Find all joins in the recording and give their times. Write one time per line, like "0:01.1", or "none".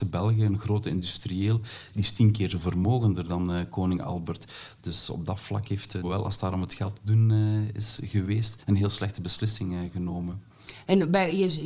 0:06.0